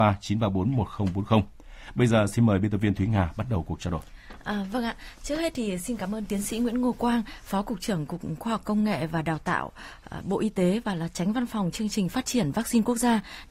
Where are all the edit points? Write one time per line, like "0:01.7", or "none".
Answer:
none